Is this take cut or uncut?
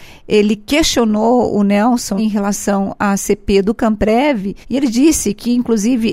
cut